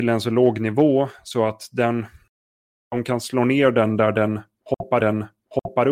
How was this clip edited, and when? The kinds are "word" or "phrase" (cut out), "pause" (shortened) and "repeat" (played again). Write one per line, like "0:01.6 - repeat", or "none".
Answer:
0:05.0 - repeat

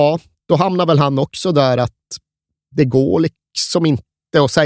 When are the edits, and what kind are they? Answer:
none

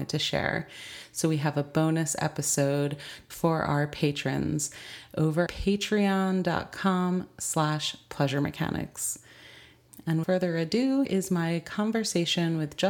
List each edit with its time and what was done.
0:03.3 - word
0:05.5 - word
0:10.2 - word
0:11.1 - word

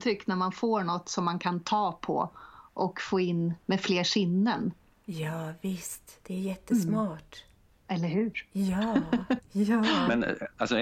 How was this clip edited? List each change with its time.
none

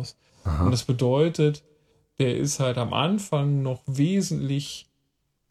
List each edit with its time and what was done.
none

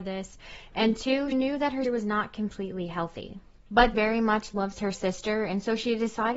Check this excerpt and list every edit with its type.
0:01.3 - word
0:01.8 - word
0:03.9 - word

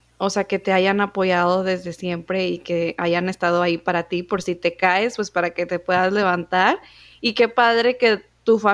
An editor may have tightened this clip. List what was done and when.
none

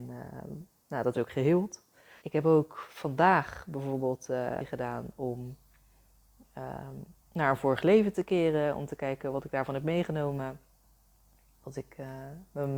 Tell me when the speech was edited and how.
0:01.1 - phrase
0:02.2 - pause
0:04.6 - word
0:07.2 - pause

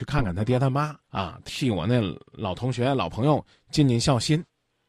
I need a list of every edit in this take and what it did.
0:01.0 - pause

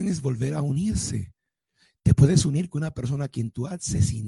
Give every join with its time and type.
none

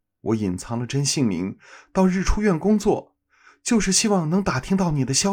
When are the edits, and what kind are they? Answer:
none

